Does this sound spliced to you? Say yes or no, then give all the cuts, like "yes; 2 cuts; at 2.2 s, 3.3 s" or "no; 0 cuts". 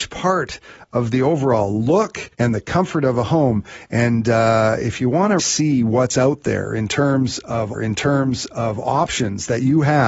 yes; 3 cuts; at 2.3 s, 5.4 s, 7.7 s